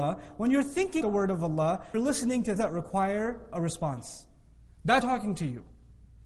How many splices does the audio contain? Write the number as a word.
four